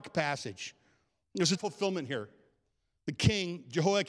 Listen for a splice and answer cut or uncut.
cut